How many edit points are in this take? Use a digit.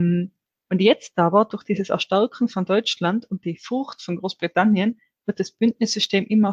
0